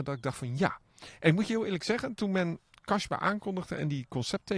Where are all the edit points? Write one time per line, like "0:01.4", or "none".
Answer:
none